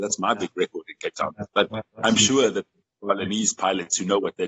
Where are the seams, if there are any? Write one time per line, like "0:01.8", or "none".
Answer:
0:01.5